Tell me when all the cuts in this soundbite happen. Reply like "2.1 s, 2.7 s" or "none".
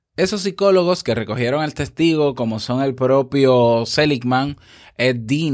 none